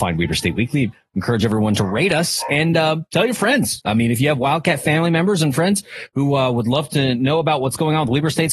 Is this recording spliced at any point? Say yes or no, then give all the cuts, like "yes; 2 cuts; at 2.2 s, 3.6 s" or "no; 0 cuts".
no; 0 cuts